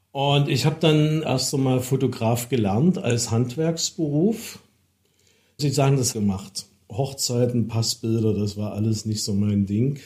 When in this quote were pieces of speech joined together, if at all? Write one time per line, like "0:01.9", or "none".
0:01.2
0:05.6
0:06.1